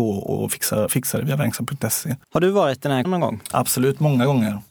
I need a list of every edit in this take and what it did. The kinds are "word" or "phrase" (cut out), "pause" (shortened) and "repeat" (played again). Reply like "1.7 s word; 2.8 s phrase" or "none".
2.2 s pause; 3.0 s word